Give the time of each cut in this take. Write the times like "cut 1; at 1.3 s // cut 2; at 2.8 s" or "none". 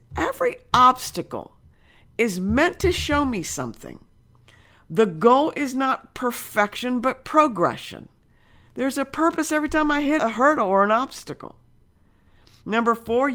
cut 1; at 10.2 s